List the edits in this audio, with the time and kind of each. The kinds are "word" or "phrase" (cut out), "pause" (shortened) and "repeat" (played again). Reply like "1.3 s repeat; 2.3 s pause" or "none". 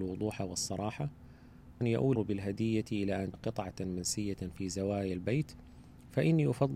1.8 s word; 2.1 s word; 3.3 s word